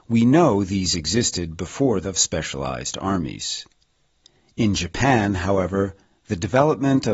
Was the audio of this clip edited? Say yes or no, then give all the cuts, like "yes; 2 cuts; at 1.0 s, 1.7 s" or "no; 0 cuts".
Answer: yes; 1 cut; at 2.0 s